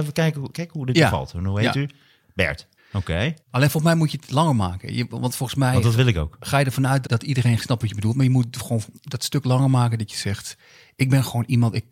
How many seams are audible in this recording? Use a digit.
4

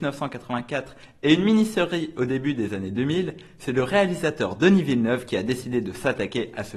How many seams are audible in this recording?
0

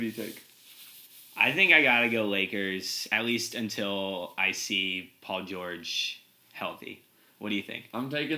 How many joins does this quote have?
0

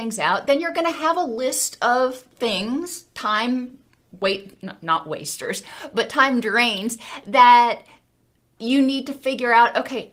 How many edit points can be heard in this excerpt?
0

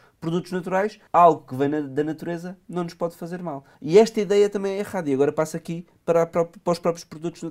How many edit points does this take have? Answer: 2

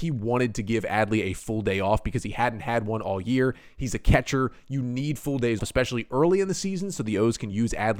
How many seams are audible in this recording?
1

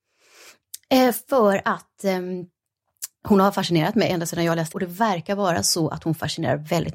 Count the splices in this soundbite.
1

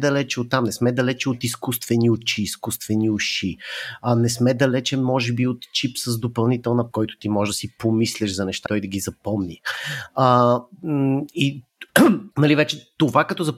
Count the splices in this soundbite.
3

